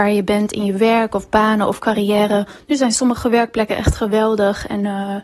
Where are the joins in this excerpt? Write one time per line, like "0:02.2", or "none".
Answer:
none

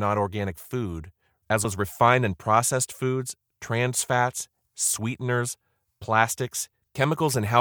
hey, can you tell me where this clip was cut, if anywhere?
0:01.6
0:04.7

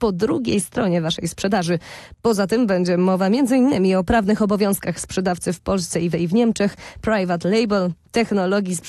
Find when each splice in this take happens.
0:06.1

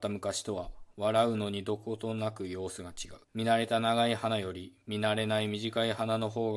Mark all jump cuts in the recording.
0:03.2

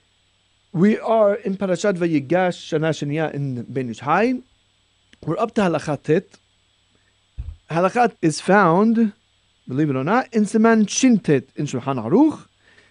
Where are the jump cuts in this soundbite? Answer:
0:08.1

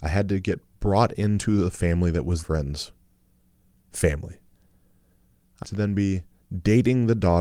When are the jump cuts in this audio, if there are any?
0:02.4
0:05.6

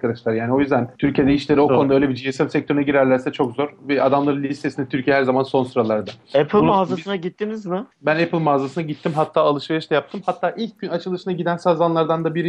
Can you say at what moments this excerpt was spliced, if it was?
0:01.0
0:07.9

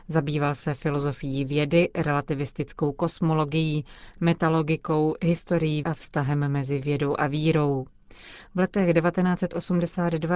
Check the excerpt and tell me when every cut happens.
0:05.8

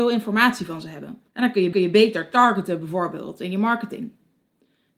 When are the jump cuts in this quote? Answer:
0:01.3
0:01.7

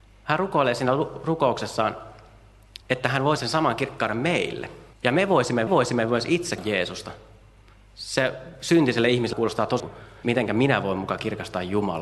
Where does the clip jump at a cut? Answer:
0:02.8
0:03.4
0:04.9
0:05.7
0:06.6
0:09.3
0:09.8
0:10.2

